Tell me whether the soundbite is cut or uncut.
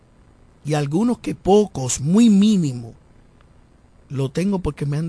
uncut